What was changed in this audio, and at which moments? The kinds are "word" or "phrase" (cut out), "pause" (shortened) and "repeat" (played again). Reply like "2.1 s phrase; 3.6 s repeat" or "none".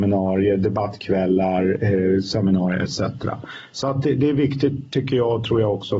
none